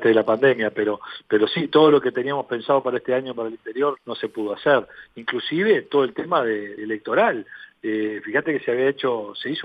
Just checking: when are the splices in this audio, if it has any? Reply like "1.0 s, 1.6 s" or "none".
4.0 s, 6.8 s